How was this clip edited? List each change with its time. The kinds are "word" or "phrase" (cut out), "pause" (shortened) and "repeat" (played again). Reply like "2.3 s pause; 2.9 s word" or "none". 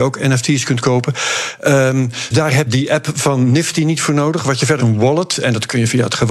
2.3 s word; 2.7 s word; 4.8 s phrase